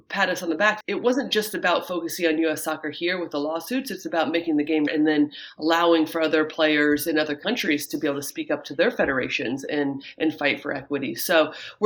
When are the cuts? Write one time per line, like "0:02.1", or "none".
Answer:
0:04.9